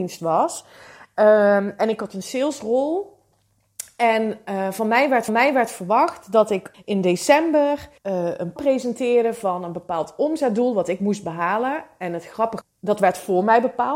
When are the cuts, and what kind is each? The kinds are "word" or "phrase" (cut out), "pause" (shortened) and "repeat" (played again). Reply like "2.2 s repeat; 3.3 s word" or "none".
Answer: 5.3 s repeat; 6.7 s word; 8.0 s pause; 8.6 s word; 12.6 s phrase